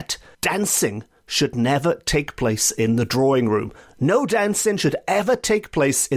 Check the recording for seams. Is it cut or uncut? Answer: uncut